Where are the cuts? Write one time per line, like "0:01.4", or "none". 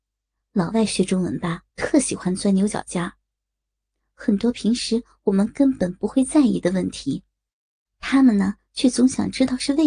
0:01.7